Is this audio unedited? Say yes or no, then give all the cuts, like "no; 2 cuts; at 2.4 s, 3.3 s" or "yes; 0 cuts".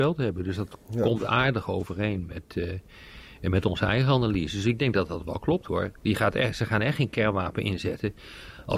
yes; 0 cuts